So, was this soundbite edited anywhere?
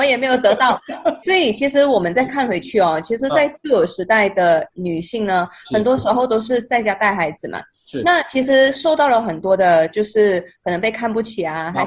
yes; 1 cut; at 1.2 s

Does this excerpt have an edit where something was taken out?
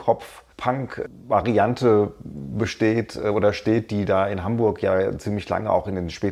no; 0 cuts

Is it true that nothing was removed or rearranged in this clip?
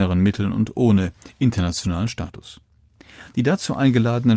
yes; 0 cuts

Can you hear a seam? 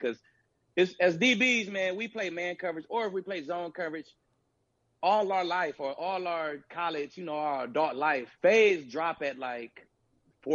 yes; 1 cut; at 8.3 s

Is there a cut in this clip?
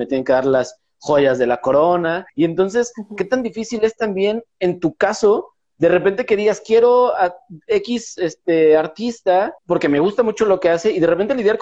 yes; 2 cuts; at 2.3 s, 9.6 s

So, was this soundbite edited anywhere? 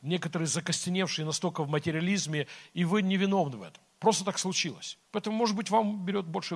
yes; 1 cut; at 5.0 s

